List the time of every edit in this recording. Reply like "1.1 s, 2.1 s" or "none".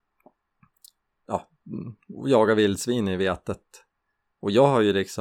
none